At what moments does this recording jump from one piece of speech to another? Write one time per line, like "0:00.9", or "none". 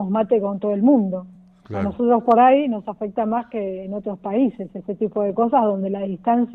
none